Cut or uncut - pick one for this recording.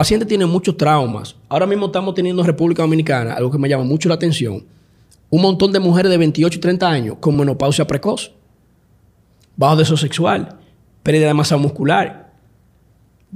uncut